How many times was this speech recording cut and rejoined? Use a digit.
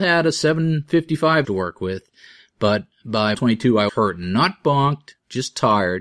3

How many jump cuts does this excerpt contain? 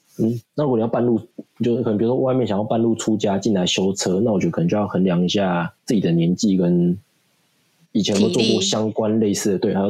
1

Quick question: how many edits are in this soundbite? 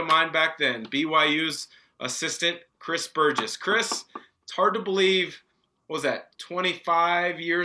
0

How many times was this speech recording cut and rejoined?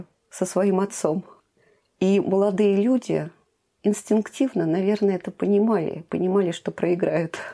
0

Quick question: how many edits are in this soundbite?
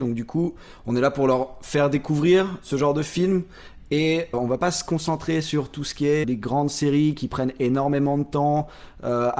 2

